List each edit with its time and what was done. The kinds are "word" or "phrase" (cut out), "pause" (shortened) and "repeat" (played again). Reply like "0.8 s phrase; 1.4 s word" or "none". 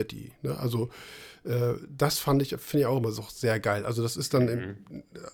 none